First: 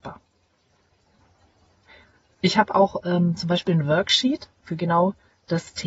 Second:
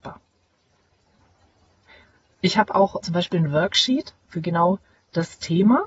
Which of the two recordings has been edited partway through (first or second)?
second